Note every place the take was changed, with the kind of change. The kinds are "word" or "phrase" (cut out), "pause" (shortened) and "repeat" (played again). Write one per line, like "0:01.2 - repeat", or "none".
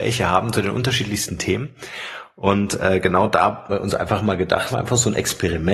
0:03.7 - word
0:04.7 - word